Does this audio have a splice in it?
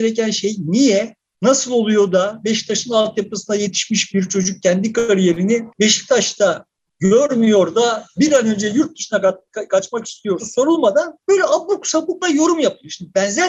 yes; 4 cuts; at 5.7 s, 10.4 s, 11.2 s, 12.2 s

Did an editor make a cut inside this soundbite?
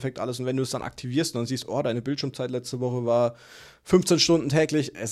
no; 0 cuts

